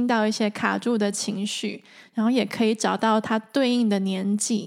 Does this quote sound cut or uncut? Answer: uncut